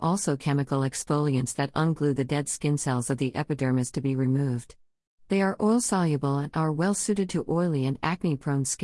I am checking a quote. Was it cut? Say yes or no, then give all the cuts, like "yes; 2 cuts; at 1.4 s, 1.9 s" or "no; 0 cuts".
no; 0 cuts